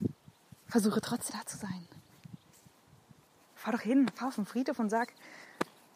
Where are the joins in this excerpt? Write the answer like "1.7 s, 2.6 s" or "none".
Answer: 1.3 s, 3.8 s